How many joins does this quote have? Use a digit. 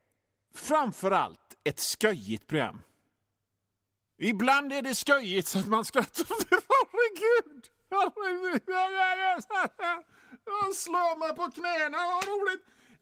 0